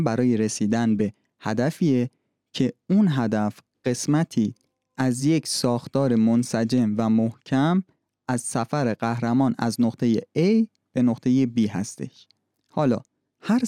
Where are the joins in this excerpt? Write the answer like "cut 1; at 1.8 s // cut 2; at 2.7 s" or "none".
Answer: none